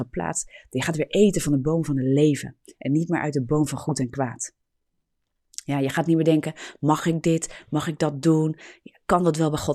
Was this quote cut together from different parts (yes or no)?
no